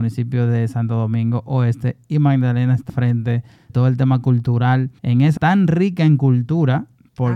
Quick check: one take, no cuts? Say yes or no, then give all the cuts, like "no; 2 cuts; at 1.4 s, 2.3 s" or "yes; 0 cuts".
no; 4 cuts; at 2.9 s, 3.7 s, 5.0 s, 5.4 s